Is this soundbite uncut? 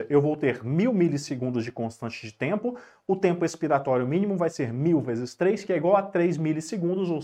yes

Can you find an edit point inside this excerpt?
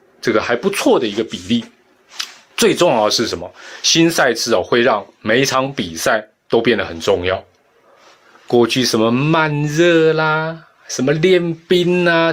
no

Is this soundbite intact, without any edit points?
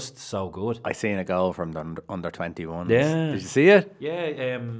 yes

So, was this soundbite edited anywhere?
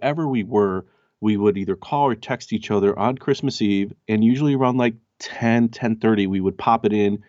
no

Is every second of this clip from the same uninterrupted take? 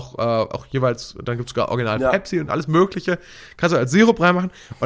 yes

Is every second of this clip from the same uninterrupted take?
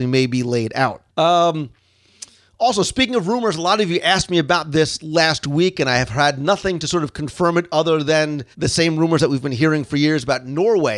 no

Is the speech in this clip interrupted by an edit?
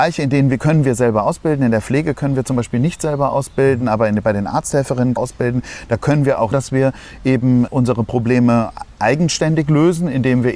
yes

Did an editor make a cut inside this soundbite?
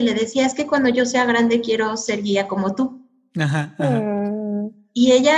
no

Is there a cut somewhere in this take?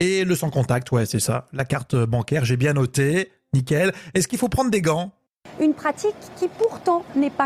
no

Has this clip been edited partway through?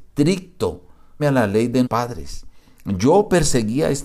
yes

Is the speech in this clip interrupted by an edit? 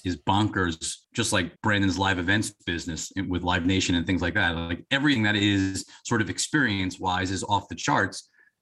yes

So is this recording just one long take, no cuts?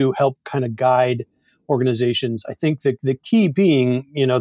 yes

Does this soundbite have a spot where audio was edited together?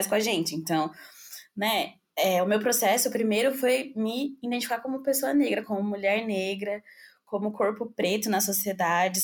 no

